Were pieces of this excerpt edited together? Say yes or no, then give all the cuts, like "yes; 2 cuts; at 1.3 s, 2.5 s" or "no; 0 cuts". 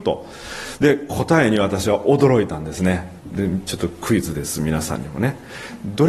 yes; 1 cut; at 3.2 s